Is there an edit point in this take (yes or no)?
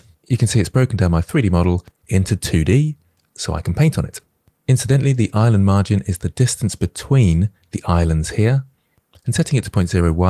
no